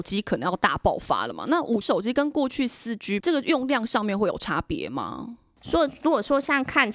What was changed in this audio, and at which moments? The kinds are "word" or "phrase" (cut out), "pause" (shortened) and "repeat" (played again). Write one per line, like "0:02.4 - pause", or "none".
0:01.8 - word
0:03.2 - phrase